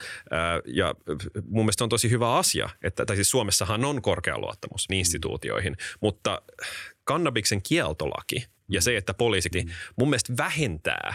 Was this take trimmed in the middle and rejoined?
yes; 2 cuts; at 4.9 s, 9.5 s

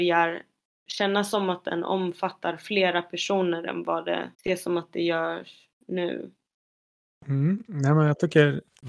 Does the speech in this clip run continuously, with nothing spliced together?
no; 1 cut; at 4.3 s

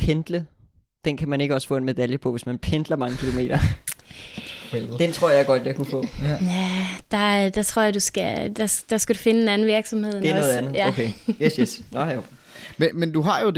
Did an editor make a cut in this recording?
no; 0 cuts

